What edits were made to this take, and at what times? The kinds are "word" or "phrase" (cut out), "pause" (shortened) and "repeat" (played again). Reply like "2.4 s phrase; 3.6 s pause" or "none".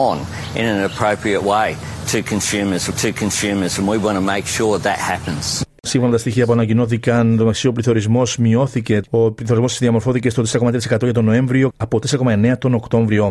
2.9 s repeat; 4.8 s word; 9.1 s pause